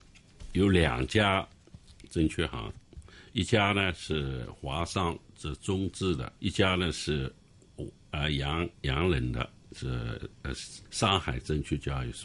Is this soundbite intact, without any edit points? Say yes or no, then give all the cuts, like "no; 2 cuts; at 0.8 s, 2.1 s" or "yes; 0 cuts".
no; 4 cuts; at 5.3 s, 6.4 s, 8.7 s, 10.9 s